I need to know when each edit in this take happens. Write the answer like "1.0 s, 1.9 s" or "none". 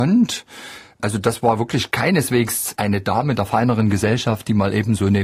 none